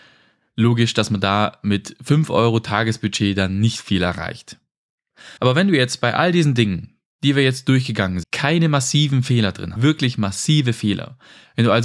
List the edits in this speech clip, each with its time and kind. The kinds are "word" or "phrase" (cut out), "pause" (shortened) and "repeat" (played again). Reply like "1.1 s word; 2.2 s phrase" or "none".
5.4 s pause; 8.2 s word; 9.8 s phrase